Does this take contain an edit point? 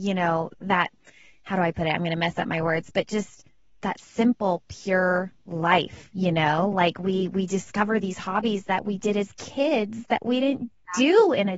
no; 0 cuts

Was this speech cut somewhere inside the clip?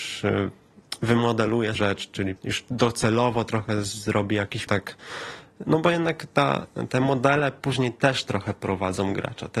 yes; 3 cuts; at 1.8 s, 2.4 s, 4.7 s

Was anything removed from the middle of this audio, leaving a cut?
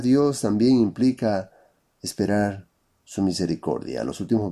no; 0 cuts

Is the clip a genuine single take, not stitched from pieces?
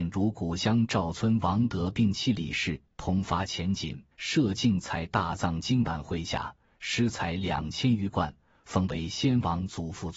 no; 1 cut; at 4.1 s

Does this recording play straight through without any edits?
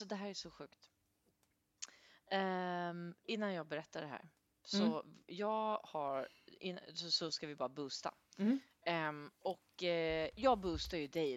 yes; 0 cuts

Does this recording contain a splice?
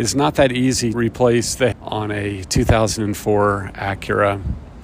yes; 2 cuts; at 0.9 s, 1.7 s

